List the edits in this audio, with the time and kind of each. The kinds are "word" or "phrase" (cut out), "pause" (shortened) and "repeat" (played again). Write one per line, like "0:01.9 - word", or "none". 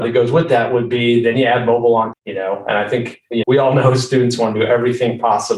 0:02.1 - word
0:03.4 - word